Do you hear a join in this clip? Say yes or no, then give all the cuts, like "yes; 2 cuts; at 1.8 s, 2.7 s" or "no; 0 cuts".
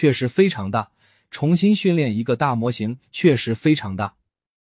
no; 0 cuts